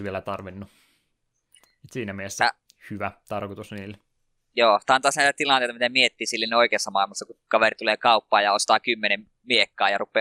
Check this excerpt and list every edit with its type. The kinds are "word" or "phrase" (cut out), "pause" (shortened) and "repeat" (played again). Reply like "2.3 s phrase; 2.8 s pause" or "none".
none

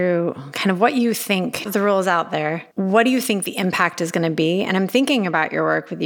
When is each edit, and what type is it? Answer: 1.7 s word; 2.7 s pause

